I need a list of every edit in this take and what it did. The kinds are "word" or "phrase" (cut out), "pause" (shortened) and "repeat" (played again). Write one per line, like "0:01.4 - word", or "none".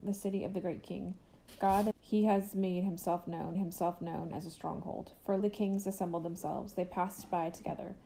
0:01.9 - phrase
0:03.5 - repeat
0:05.4 - word